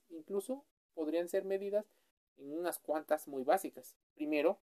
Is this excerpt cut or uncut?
uncut